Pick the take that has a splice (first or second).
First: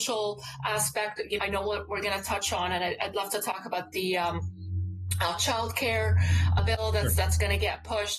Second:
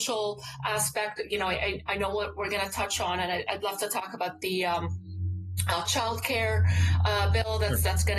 first